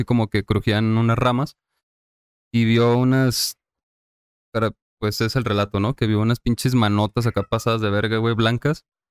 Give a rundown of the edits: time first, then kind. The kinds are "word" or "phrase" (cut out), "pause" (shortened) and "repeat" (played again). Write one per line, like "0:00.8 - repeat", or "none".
none

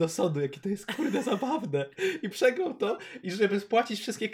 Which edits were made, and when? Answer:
0:02.3 - word

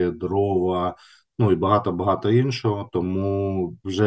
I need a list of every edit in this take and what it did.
none

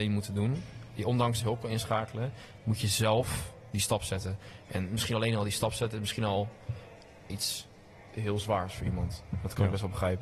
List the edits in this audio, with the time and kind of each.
0:01.4 - phrase
0:07.3 - word

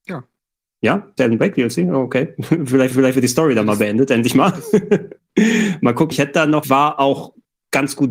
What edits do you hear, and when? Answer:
0:01.2 - word
0:02.9 - repeat
0:06.1 - word
0:06.6 - phrase

